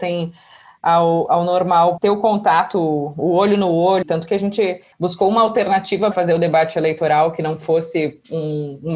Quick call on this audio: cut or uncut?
cut